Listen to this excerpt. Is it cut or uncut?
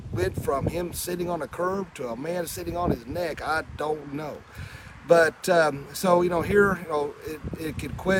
uncut